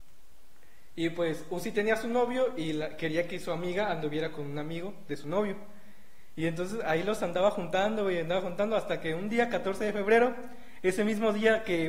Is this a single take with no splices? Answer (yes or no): yes